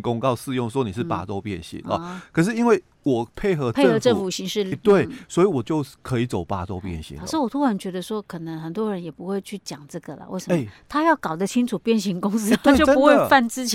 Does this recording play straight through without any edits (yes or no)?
no